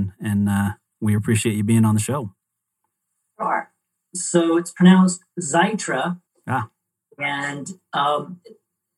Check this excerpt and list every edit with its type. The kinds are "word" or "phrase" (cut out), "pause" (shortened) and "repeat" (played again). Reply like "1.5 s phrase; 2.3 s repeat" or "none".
1.2 s word; 6.3 s pause